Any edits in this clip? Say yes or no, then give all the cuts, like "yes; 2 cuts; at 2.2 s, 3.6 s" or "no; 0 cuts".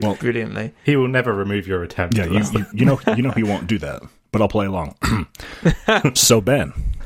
yes; 1 cut; at 2.7 s